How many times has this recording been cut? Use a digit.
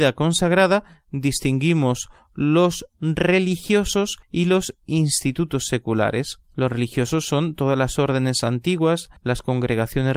3